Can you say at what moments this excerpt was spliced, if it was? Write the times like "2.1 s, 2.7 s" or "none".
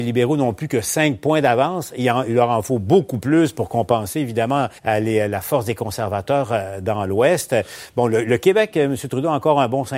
4.8 s

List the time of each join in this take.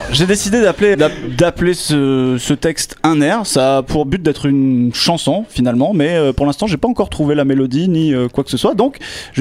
0.9 s

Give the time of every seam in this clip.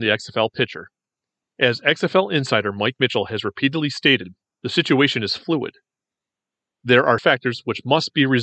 7.2 s

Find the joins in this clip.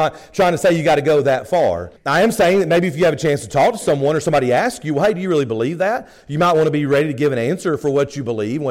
2.0 s

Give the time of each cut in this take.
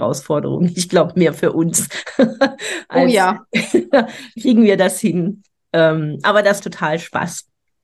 4.4 s, 6.6 s

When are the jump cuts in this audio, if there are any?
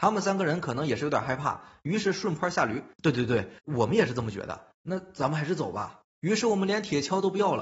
2.9 s, 3.6 s, 6.1 s

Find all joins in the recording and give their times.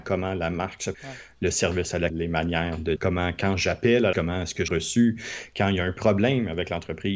0.9 s, 2.1 s, 3.0 s, 4.1 s, 4.7 s

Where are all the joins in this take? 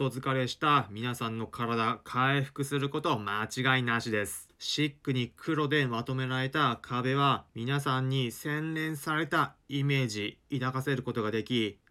7.5 s

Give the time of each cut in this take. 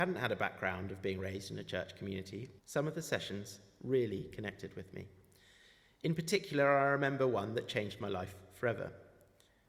2.6 s

